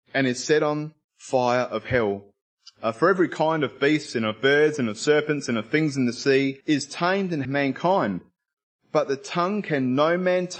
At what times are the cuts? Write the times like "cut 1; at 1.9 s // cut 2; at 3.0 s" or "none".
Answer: cut 1; at 3.3 s // cut 2; at 6.6 s // cut 3; at 7.4 s